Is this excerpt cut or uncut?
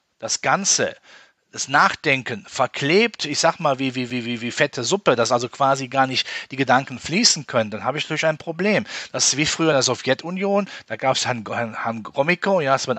uncut